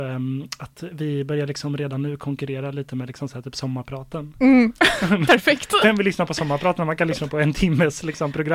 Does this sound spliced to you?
no; 0 cuts

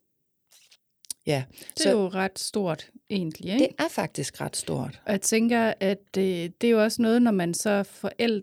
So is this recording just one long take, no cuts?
yes; 0 cuts

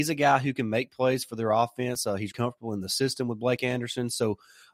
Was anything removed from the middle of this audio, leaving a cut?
yes; 1 cut; at 2.3 s

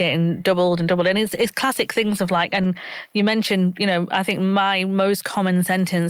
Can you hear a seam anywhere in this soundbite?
no; 0 cuts

